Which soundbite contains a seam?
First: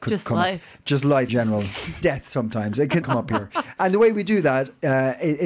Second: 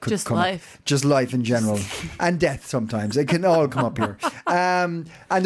first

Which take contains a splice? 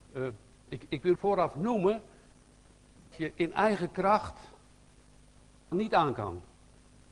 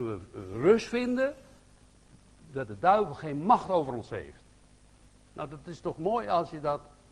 first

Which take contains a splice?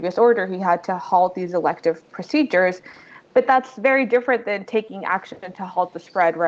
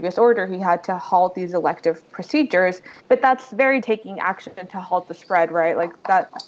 second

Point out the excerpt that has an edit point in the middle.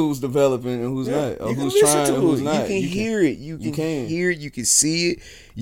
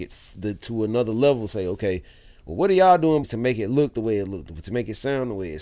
second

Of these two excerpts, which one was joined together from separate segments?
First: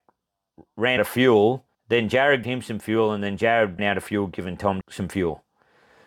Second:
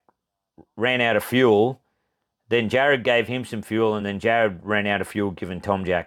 first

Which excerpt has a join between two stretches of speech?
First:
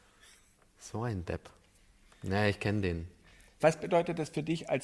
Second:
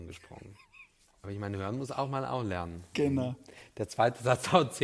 second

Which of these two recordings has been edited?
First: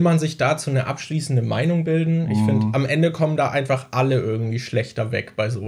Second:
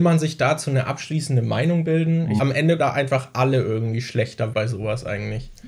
second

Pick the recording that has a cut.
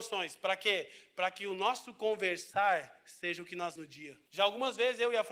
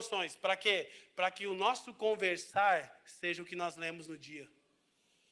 first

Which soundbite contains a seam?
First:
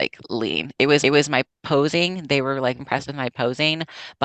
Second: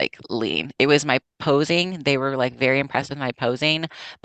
first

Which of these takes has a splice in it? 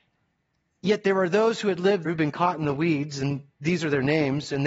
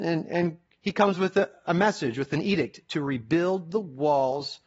first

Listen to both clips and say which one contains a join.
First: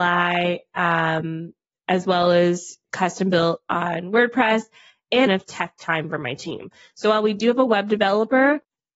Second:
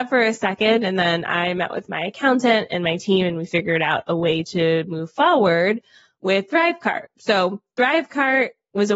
first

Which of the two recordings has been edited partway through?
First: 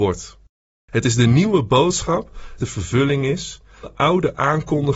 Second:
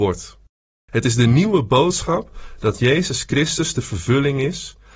first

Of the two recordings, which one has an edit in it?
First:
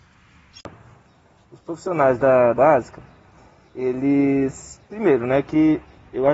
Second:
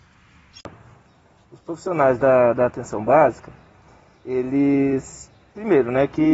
first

